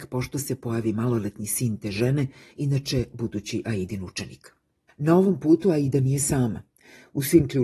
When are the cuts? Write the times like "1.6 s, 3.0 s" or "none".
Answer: none